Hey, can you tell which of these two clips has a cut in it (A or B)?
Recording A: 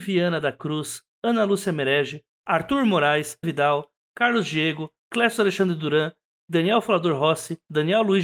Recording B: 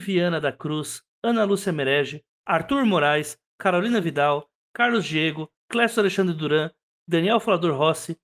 A